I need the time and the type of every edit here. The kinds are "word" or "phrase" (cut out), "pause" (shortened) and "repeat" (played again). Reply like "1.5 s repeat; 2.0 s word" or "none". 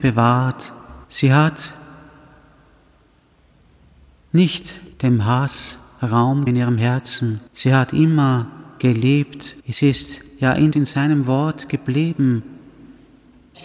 1.0 s pause; 4.9 s pause; 6.5 s word; 7.5 s pause; 9.6 s pause; 10.3 s pause; 10.7 s phrase